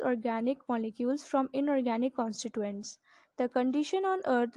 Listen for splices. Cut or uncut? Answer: uncut